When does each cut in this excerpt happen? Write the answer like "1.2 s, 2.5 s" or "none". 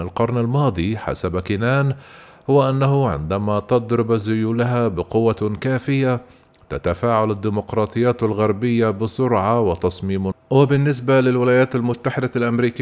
10.3 s